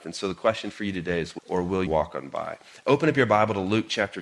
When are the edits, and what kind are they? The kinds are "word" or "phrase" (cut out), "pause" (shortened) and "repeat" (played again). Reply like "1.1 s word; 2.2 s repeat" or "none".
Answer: 1.4 s phrase; 1.9 s word